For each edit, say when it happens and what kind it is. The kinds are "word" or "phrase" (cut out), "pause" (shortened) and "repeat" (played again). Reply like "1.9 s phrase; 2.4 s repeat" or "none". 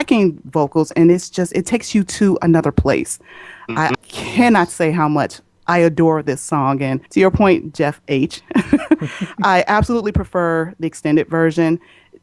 3.9 s word; 7.1 s pause